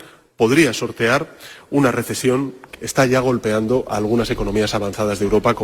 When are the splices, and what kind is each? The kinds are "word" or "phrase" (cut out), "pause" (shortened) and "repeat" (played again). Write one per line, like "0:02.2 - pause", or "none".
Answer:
0:02.7 - word